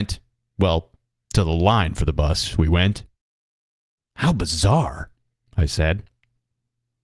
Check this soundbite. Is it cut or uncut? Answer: uncut